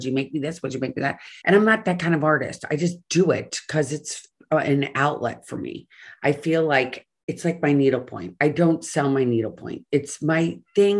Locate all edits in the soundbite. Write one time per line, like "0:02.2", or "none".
0:01.4